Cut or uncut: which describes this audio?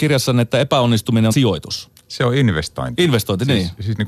cut